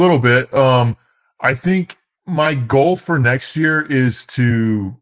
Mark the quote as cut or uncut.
uncut